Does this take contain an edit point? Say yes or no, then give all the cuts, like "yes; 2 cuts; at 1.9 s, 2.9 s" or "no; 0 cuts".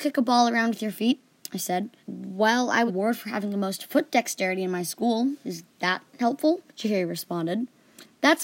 yes; 3 cuts; at 2.0 s, 2.9 s, 6.7 s